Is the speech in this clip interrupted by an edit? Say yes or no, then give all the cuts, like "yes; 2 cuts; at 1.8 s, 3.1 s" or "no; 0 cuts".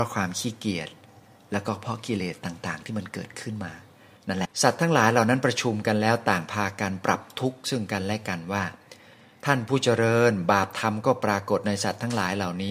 yes; 1 cut; at 4.5 s